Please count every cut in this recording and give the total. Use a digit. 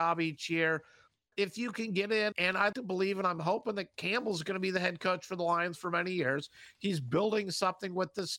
3